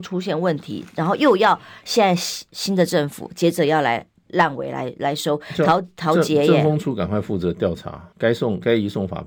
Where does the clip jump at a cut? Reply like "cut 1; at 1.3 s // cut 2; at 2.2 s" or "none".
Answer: cut 1; at 8.1 s